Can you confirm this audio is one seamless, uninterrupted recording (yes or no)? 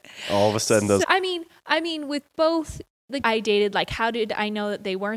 no